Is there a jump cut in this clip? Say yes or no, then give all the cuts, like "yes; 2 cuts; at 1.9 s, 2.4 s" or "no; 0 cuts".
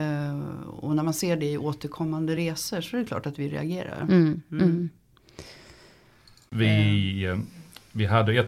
no; 0 cuts